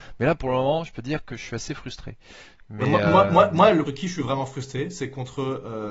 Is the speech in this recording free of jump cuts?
no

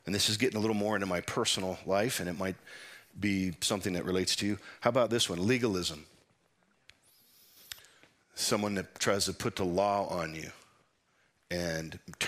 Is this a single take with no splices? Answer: yes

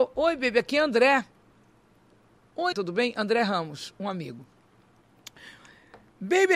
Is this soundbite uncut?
no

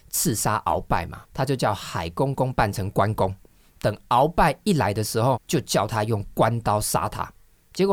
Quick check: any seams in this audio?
yes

